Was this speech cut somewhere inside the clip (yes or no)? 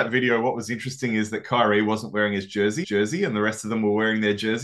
yes